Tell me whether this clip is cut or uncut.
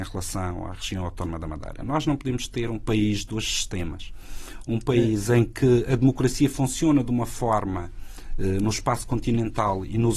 uncut